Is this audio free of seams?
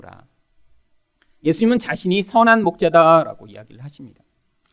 yes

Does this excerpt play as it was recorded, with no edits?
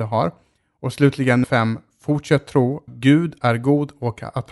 no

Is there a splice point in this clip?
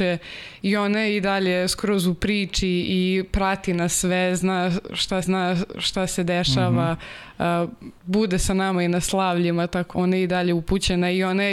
yes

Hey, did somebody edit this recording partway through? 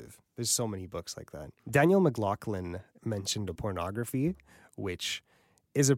yes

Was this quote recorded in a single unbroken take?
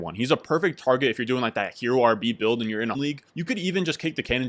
no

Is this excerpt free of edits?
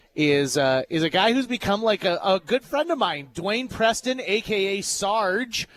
yes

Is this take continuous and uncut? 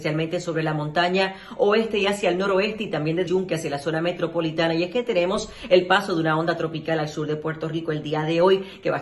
no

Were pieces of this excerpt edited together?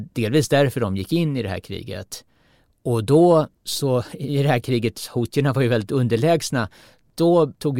yes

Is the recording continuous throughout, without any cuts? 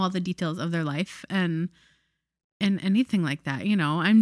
yes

